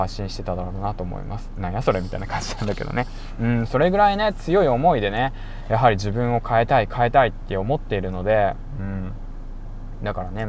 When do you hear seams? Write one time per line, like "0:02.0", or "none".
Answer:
none

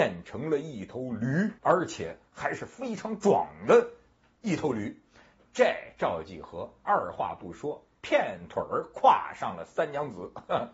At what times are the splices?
0:01.6

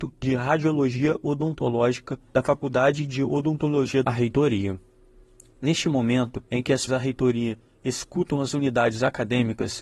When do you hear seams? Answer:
0:02.3
0:04.0
0:06.5
0:06.9

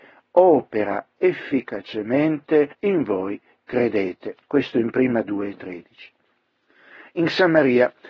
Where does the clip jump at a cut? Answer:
0:02.7
0:03.6
0:04.4
0:05.2

